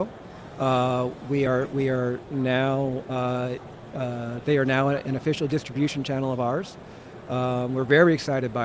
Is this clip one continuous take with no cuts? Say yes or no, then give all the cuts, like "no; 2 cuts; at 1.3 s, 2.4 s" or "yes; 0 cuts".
yes; 0 cuts